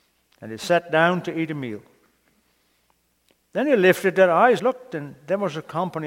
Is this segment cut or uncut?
cut